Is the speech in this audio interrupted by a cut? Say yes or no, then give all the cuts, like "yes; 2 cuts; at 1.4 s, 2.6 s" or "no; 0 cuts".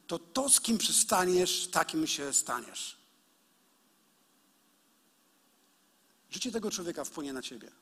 no; 0 cuts